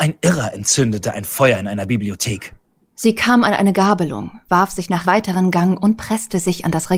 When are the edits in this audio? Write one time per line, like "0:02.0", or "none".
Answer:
0:05.0